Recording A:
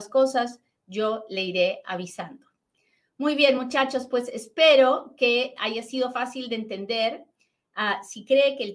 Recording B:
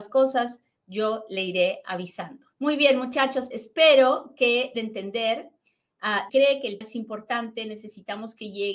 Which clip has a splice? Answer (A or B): B